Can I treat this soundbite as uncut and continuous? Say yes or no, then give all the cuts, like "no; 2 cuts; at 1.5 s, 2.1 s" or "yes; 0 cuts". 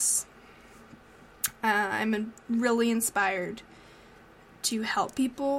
yes; 0 cuts